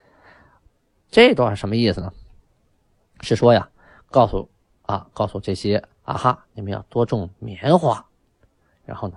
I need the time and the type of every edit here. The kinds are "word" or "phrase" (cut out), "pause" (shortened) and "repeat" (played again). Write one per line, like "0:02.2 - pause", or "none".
none

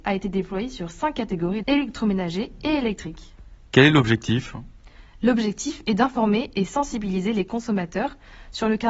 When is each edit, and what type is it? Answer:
0:01.6 - word

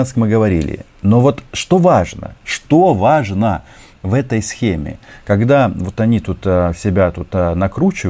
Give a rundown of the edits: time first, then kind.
none

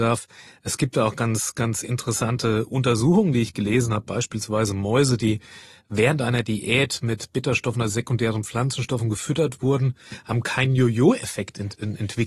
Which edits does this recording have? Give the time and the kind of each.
none

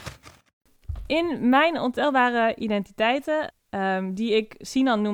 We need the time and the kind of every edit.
0:03.5 - phrase

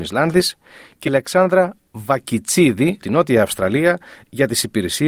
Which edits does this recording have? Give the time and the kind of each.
0:01.1 - word
0:03.0 - word

